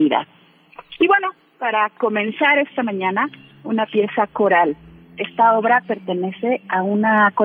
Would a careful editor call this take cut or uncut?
uncut